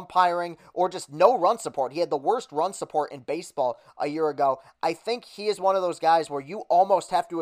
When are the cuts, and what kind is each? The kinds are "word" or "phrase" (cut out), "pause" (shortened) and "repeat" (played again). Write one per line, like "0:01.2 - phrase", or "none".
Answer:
none